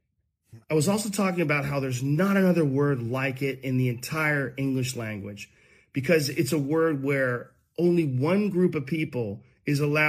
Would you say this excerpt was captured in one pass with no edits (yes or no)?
yes